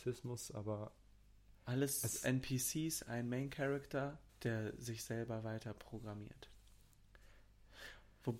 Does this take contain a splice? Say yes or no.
yes